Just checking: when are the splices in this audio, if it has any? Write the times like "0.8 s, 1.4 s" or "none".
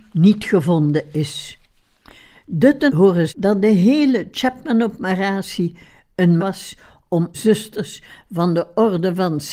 2.9 s, 3.3 s, 6.4 s, 7.3 s